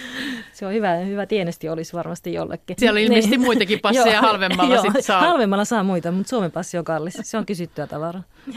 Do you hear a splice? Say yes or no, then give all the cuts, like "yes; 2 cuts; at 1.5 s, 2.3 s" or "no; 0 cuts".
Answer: no; 0 cuts